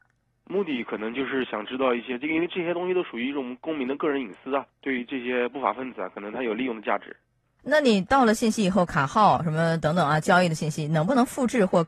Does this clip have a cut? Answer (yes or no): no